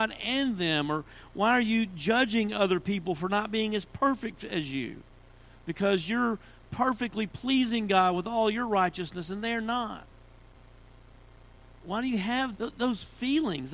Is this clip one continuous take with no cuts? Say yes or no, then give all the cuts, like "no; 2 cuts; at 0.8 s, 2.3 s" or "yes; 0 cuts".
no; 1 cut; at 12.5 s